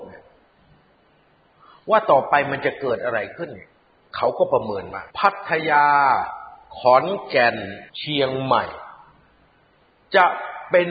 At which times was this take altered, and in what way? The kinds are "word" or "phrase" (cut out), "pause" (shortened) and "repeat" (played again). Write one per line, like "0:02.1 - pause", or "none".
0:05.1 - pause
0:07.9 - pause